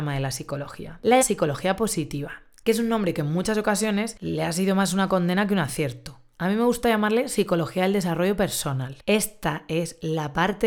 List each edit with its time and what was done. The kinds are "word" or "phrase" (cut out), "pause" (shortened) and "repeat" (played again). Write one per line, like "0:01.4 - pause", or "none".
0:01.2 - word